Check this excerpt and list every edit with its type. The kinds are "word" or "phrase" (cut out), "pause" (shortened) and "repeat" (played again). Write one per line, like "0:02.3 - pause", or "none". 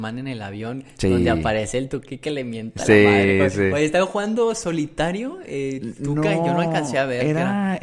none